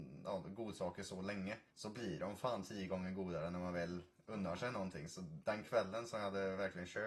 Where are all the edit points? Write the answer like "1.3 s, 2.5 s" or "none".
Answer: 1.7 s